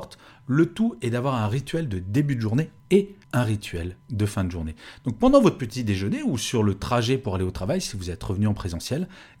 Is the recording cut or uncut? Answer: cut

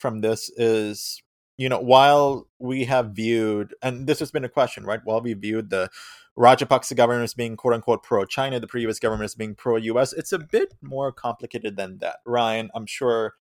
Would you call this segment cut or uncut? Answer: uncut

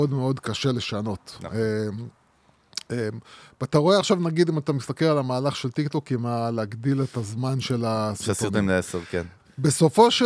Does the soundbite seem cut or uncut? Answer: uncut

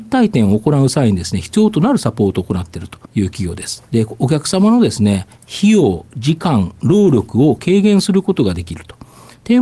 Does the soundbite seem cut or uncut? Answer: cut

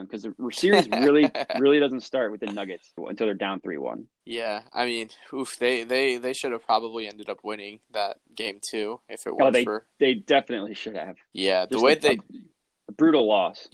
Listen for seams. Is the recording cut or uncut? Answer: cut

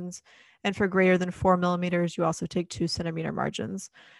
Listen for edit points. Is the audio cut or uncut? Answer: uncut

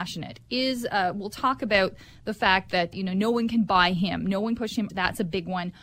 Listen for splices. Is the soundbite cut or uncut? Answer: cut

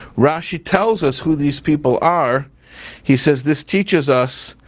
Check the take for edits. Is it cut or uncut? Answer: uncut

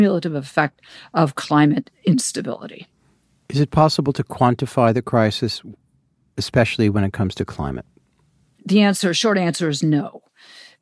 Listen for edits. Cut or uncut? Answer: uncut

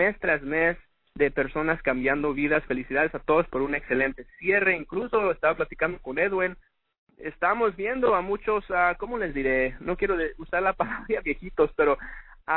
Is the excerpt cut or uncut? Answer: uncut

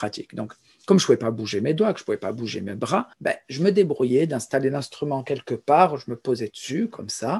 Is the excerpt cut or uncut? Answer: cut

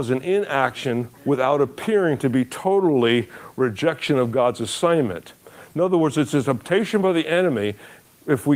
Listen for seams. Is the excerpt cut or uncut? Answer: cut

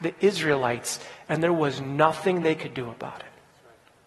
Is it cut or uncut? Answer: uncut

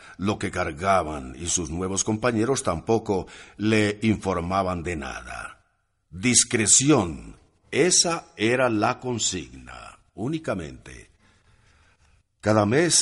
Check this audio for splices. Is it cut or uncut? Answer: uncut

